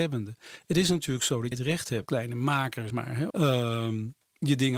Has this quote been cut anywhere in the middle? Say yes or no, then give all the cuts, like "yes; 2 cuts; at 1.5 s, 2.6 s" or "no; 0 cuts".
yes; 4 cuts; at 1.5 s, 2.1 s, 2.9 s, 3.3 s